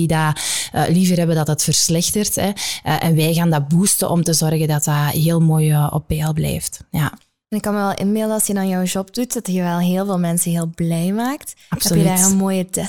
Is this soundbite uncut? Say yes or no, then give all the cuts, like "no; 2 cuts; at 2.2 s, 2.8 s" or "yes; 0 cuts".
yes; 0 cuts